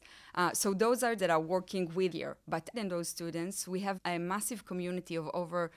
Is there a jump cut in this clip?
yes; 4 cuts; at 1.2 s, 2.1 s, 2.7 s, 4.0 s

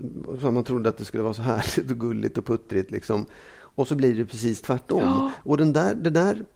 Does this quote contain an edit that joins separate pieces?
no; 0 cuts

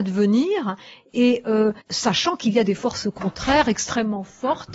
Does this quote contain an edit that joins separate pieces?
yes; 1 cut; at 1.8 s

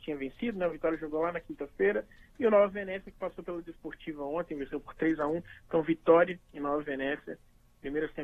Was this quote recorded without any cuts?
yes; 0 cuts

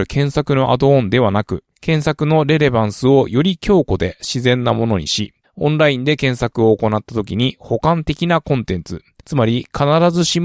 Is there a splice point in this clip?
yes; 3 cuts; at 1.7 s, 5.4 s, 9.2 s

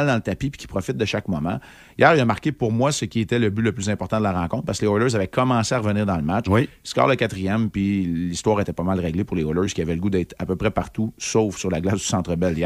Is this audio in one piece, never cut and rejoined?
yes; 0 cuts

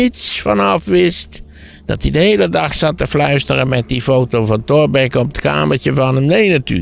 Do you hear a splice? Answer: yes; 1 cut; at 5.3 s

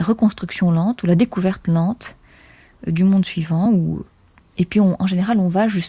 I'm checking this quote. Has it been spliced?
no; 0 cuts

